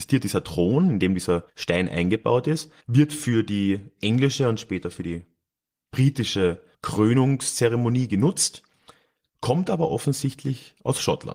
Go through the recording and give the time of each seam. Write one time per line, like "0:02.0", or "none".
0:01.5
0:02.8
0:06.7